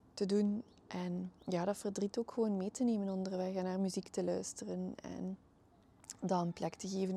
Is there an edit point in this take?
yes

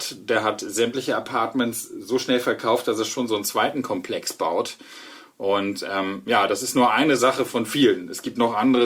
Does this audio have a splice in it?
no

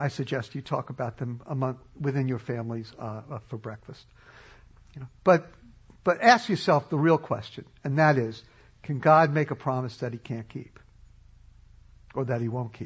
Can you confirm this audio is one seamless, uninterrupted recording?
yes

